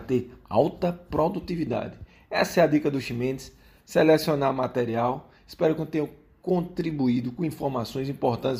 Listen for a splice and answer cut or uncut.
uncut